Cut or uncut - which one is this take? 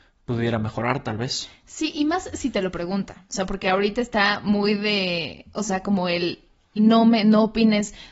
uncut